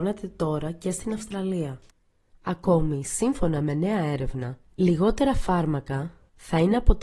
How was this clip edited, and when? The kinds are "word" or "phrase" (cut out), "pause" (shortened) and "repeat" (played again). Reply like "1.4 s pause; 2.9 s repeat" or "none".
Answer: none